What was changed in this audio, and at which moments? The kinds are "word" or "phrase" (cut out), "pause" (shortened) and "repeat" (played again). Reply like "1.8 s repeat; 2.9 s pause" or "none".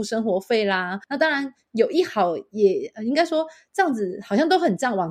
1.0 s pause